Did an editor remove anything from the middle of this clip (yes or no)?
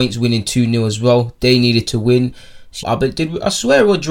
yes